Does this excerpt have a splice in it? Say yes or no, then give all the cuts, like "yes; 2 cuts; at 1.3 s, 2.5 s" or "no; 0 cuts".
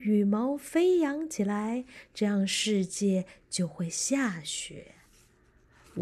no; 0 cuts